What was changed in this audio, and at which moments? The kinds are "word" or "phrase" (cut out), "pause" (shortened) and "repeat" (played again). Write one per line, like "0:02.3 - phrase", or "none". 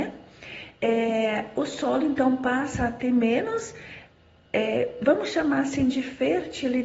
none

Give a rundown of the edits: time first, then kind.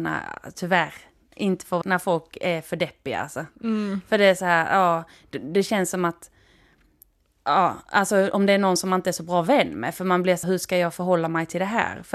0:01.8 - word
0:10.4 - word

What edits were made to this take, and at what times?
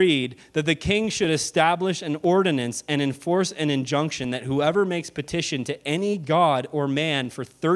none

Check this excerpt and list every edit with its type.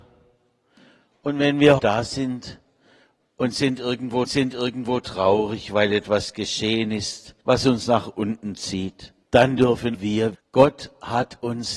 0:01.8 - word
0:04.3 - repeat
0:07.4 - pause
0:09.2 - pause
0:09.9 - word
0:10.3 - word

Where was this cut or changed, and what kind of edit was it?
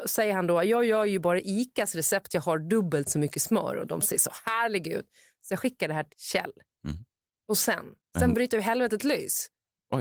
0:02.3 - word
0:06.1 - word
0:08.0 - pause

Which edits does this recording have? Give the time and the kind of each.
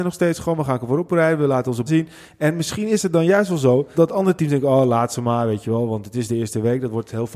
0:01.9 - word
0:03.9 - word

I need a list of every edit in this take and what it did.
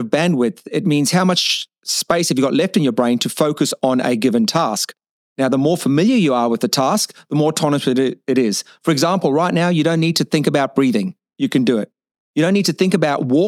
none

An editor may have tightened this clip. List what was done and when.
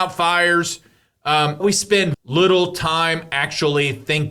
0:01.6 - word
0:02.1 - word

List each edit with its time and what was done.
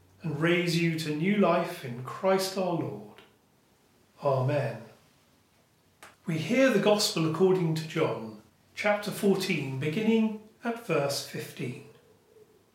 0:06.1 - pause
0:08.5 - pause

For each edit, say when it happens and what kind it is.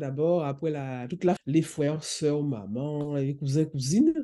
0:01.4 - word

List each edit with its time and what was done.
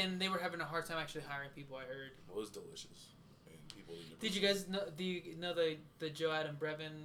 none

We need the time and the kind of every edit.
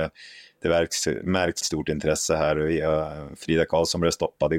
0:01.6 - phrase

